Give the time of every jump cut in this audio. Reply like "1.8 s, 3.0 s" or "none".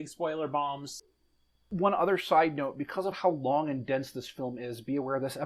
none